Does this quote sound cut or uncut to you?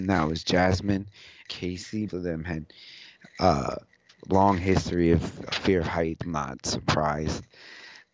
cut